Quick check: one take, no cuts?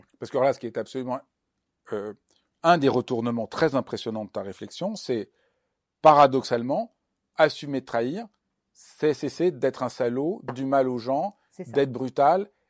no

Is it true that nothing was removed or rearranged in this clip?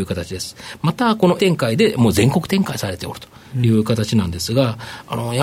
no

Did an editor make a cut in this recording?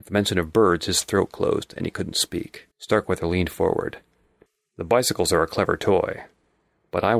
yes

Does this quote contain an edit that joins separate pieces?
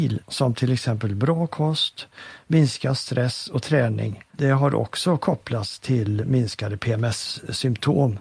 yes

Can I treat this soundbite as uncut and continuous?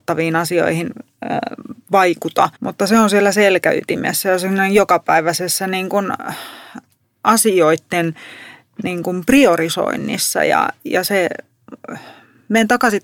no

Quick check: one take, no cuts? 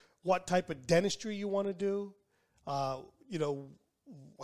yes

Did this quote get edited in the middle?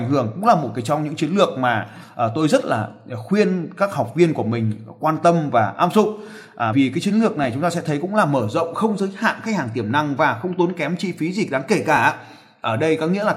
yes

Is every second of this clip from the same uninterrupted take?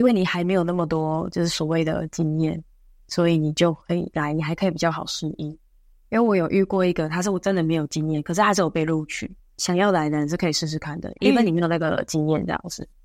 yes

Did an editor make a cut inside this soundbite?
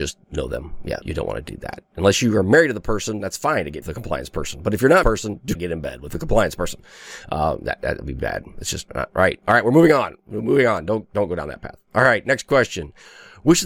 yes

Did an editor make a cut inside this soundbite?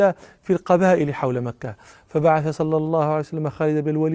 no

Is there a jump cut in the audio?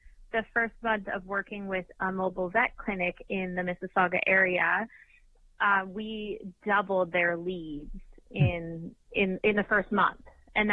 no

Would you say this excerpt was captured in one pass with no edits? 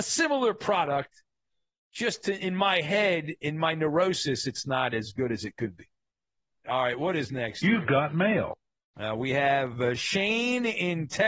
yes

